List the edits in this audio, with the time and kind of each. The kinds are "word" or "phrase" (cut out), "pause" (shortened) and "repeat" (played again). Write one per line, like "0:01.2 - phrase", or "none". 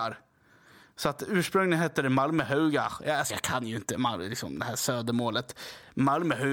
0:03.3 - word